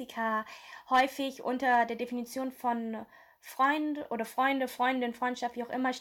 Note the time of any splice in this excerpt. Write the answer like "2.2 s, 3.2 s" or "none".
none